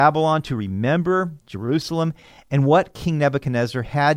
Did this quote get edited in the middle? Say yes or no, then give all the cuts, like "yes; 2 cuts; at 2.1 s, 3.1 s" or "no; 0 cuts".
no; 0 cuts